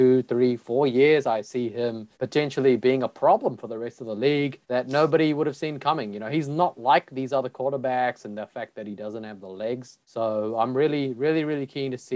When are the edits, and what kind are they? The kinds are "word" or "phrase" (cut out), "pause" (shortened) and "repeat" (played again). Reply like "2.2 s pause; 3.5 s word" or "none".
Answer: 2.1 s pause; 4.6 s pause; 10.0 s pause